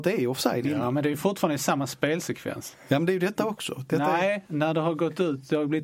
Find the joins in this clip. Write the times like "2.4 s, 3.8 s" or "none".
none